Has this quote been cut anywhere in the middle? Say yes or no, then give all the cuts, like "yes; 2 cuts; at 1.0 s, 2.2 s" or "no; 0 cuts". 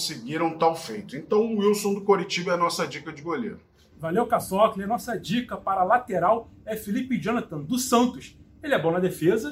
no; 0 cuts